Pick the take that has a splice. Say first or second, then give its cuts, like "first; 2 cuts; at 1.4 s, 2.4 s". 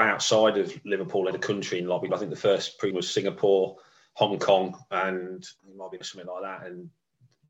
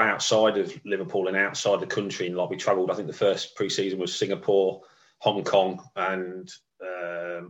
first; 5 cuts; at 1.3 s, 2.1 s, 2.9 s, 5.6 s, 6.0 s